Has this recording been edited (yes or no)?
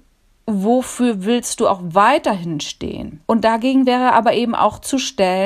yes